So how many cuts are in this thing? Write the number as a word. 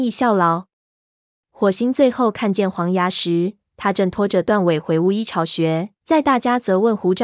one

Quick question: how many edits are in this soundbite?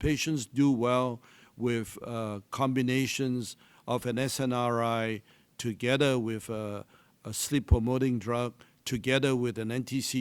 zero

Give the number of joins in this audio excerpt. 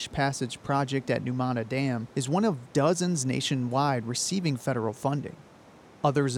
one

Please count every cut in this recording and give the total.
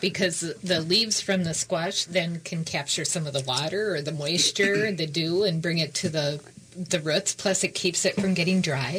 zero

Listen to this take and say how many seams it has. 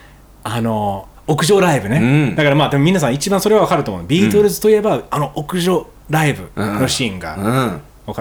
zero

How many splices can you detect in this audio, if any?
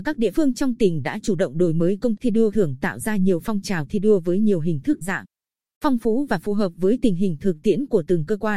three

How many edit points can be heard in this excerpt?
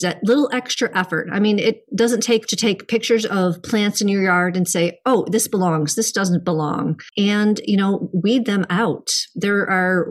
one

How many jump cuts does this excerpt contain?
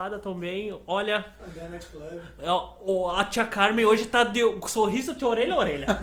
zero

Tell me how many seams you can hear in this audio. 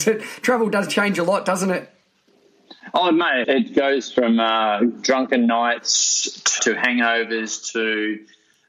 two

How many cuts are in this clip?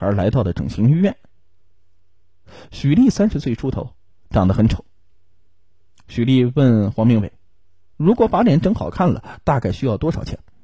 zero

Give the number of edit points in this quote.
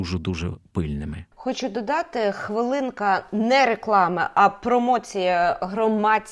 one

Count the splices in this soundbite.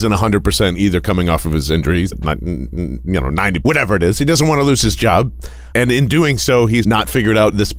five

